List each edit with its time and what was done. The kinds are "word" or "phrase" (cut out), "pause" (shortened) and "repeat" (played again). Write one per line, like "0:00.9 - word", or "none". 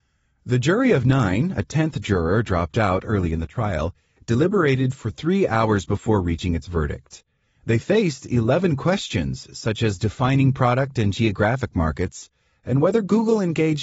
none